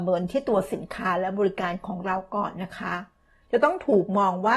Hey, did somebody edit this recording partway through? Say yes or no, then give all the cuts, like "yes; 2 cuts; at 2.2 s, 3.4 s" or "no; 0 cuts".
no; 0 cuts